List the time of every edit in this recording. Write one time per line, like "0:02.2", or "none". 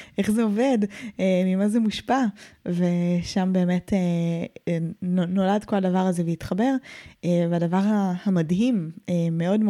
none